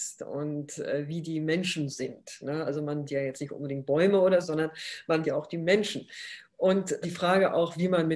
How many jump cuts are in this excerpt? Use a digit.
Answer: 5